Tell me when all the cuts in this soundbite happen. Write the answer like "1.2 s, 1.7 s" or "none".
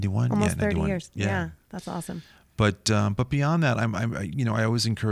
none